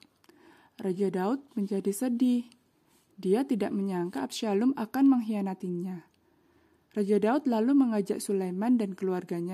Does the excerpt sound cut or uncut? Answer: uncut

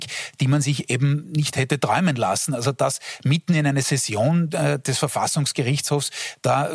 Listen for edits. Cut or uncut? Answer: uncut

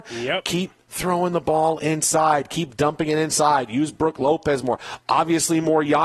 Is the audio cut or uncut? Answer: uncut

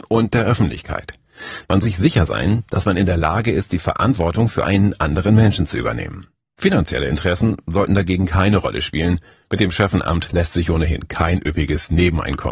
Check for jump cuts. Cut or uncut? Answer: cut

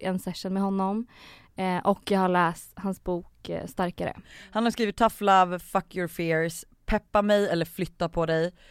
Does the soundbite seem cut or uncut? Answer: uncut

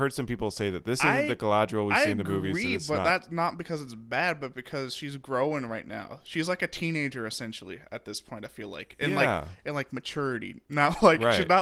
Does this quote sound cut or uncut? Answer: uncut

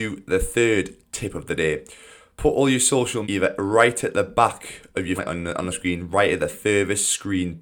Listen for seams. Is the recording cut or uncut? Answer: cut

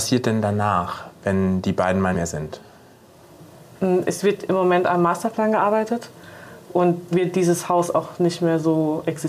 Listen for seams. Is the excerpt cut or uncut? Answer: cut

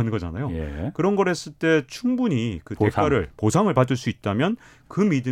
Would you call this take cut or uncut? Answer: uncut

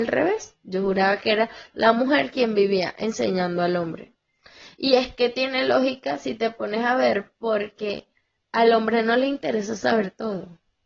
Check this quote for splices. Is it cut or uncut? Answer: uncut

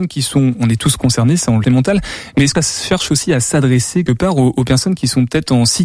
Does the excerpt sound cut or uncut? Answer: cut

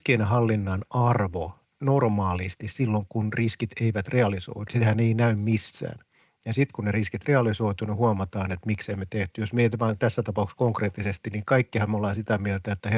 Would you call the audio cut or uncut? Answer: cut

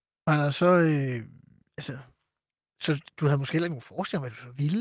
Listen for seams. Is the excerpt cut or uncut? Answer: uncut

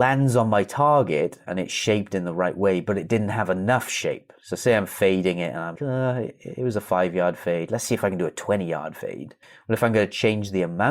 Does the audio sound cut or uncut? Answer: cut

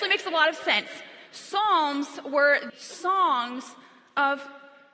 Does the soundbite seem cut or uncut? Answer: cut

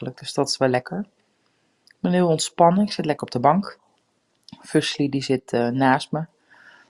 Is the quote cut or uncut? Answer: uncut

